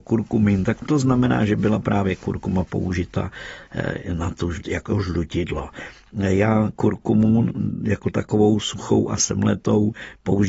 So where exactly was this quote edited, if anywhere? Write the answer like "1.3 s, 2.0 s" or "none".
4.6 s